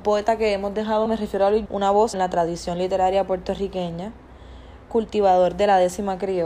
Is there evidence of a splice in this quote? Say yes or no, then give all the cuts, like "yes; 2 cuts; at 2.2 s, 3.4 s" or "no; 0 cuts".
yes; 3 cuts; at 1.1 s, 1.7 s, 2.1 s